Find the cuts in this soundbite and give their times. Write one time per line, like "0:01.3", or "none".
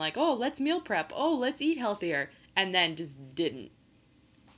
none